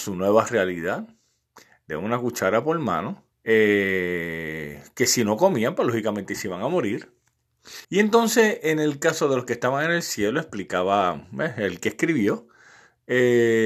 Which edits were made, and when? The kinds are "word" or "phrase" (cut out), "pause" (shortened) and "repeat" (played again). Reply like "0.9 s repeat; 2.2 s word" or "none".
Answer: 3.3 s pause; 7.8 s pause